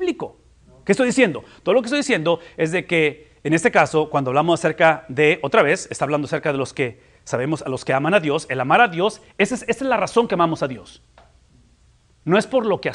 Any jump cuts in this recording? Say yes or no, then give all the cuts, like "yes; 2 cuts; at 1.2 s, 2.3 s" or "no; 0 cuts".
no; 0 cuts